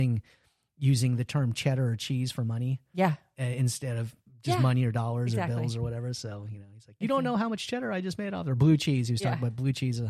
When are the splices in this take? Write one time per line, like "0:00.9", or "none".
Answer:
none